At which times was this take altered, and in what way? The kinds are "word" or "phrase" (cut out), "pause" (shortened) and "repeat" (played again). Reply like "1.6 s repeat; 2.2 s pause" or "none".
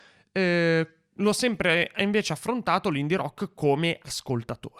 none